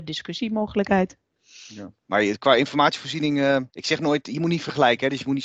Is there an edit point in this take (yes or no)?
yes